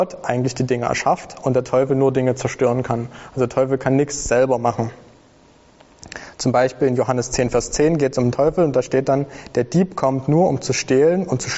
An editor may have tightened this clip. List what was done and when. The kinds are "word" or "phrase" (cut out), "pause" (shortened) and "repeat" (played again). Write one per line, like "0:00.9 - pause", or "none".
none